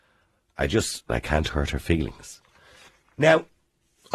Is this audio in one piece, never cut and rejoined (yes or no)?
no